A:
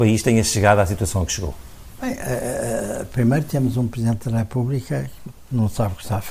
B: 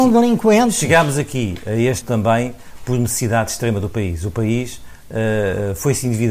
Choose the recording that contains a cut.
B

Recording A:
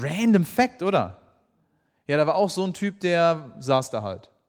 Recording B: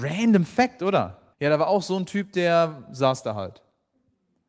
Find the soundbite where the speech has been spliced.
B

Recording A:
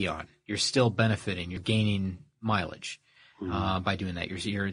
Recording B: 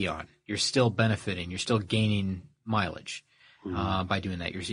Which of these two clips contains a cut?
A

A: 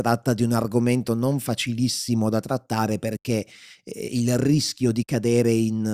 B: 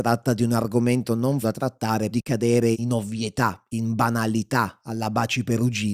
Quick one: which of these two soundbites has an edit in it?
B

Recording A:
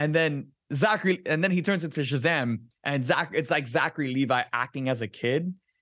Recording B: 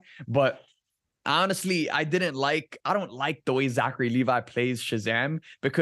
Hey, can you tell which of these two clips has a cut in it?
A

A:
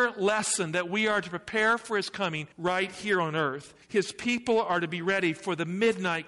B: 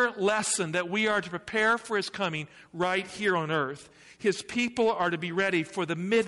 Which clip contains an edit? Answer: A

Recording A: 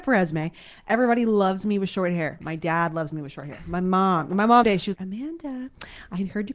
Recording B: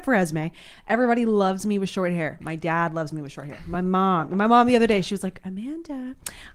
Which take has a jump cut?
A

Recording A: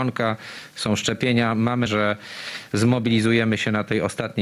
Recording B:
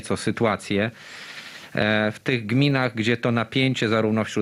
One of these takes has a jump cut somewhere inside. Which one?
A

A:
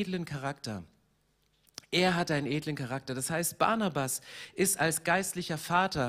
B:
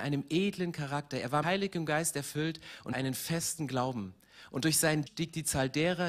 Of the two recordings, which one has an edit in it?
B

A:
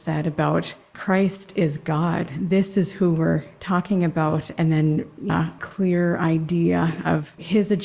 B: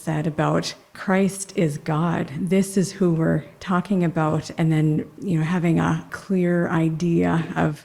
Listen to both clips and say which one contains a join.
A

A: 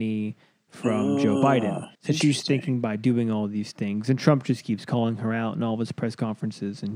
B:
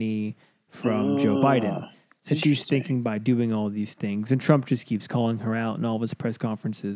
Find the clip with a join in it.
A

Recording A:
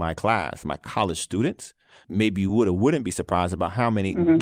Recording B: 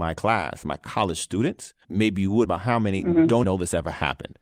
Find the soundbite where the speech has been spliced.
B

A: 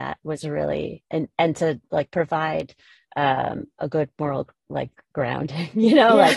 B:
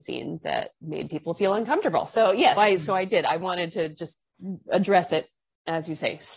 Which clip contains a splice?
B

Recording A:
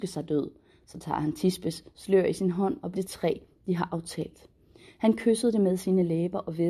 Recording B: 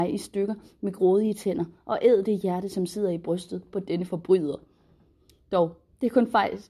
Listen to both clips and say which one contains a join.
A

